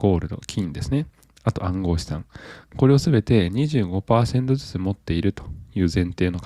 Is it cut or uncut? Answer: uncut